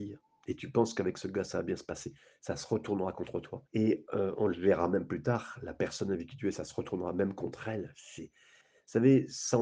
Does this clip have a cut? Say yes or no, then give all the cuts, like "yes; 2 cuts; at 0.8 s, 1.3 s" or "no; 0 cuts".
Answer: yes; 1 cut; at 3.7 s